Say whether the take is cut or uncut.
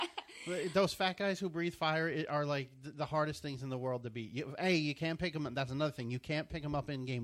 uncut